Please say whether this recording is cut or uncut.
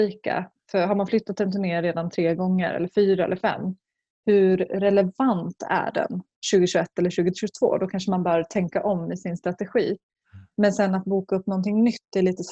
uncut